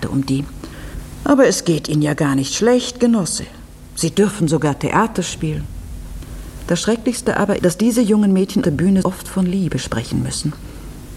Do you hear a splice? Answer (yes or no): yes